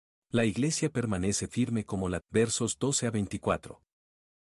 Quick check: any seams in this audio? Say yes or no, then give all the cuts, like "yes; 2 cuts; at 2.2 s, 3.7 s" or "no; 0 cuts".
yes; 2 cuts; at 1.5 s, 2.2 s